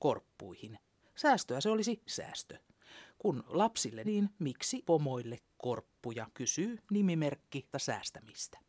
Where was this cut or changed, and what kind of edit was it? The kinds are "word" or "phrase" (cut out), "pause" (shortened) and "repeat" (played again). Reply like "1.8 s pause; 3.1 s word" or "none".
2.1 s word; 4.0 s word; 4.8 s word; 6.3 s pause; 7.7 s word